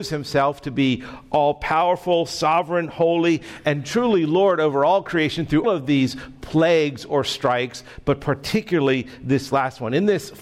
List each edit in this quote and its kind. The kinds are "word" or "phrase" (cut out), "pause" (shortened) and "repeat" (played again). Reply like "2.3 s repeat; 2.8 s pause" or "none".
5.6 s word